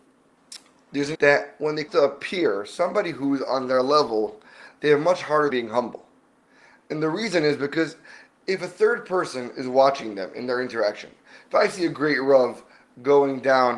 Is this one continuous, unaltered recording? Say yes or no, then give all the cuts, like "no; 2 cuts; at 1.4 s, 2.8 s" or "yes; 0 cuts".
no; 3 cuts; at 1.1 s, 1.9 s, 5.5 s